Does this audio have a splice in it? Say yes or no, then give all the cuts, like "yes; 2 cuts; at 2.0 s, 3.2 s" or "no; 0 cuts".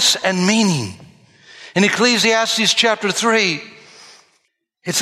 no; 0 cuts